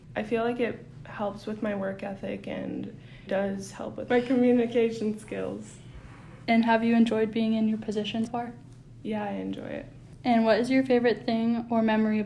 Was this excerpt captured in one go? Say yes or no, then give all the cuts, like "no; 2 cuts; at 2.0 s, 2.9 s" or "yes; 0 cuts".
no; 2 cuts; at 3.3 s, 8.3 s